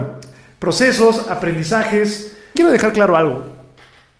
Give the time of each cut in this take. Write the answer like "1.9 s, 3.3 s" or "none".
2.6 s